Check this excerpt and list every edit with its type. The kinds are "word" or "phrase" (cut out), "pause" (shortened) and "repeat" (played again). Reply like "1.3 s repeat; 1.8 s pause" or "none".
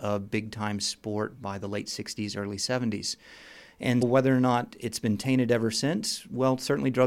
1.4 s word; 4.0 s word